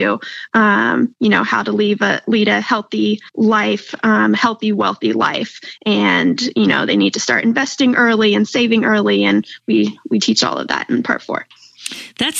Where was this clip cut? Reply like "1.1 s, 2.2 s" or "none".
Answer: 3.3 s